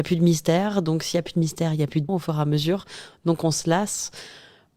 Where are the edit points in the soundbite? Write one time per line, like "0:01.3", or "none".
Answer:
0:02.1